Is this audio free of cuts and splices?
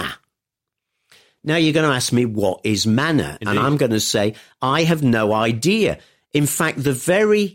yes; 0 cuts

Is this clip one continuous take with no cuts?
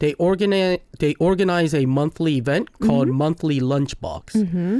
yes; 0 cuts

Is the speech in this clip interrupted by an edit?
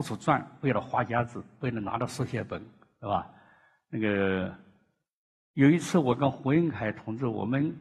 no; 0 cuts

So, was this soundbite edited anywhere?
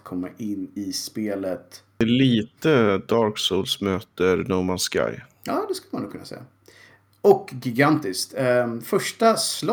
no; 0 cuts

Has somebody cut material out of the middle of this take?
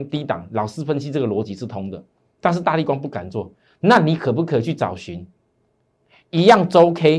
no; 0 cuts

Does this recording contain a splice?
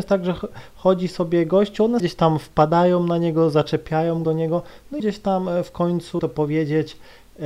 yes; 4 cuts; at 2.0 s, 4.2 s, 5.0 s, 6.2 s

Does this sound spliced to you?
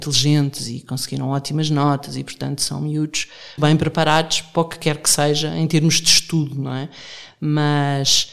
yes; 1 cut; at 3.6 s

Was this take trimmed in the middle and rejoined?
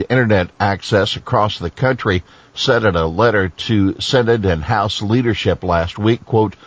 no; 0 cuts

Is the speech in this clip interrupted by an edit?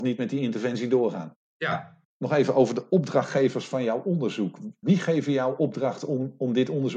no; 0 cuts

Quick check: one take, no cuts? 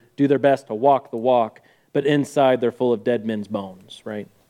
yes; 0 cuts

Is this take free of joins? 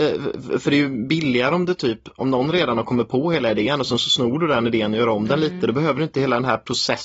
yes; 0 cuts

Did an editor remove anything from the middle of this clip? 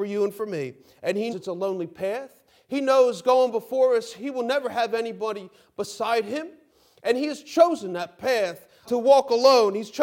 yes; 2 cuts; at 1.3 s, 8.8 s

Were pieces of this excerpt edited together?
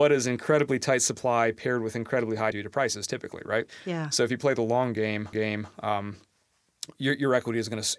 yes; 2 cuts; at 2.5 s, 5.3 s

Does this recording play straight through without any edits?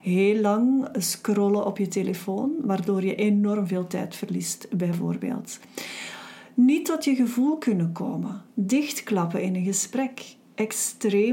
yes; 0 cuts

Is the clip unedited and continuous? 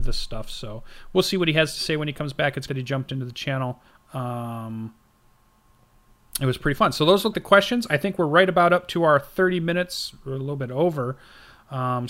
no; 3 cuts; at 2.7 s, 3.9 s, 7.3 s

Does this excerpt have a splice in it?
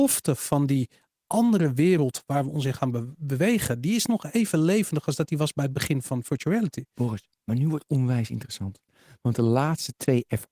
no; 0 cuts

